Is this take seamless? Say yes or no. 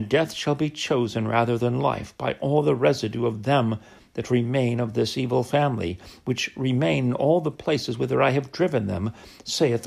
yes